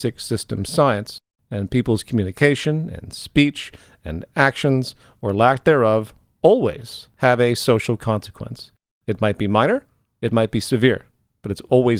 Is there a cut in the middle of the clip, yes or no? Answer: no